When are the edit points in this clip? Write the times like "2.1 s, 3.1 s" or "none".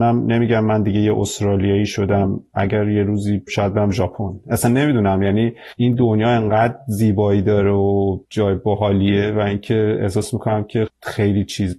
3.5 s, 8.2 s, 10.9 s